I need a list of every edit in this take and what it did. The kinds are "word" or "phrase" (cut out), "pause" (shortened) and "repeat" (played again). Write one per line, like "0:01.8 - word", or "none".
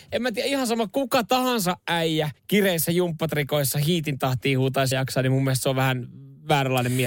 0:02.4 - pause
0:04.9 - word